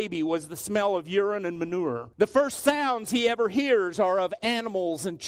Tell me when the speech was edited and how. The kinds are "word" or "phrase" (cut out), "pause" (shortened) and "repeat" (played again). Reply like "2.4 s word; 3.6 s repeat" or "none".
2.1 s pause

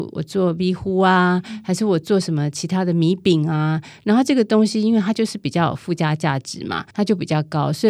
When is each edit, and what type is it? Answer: 6.9 s pause

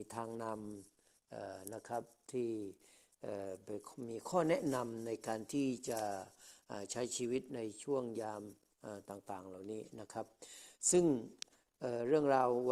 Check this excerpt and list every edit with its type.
none

